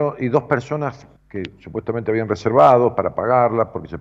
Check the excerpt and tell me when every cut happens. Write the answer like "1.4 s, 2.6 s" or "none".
1.2 s